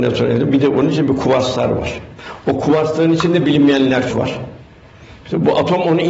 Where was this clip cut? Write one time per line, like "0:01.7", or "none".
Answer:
0:04.1